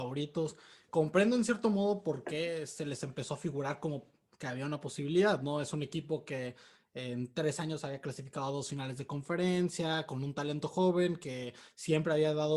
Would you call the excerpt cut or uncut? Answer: uncut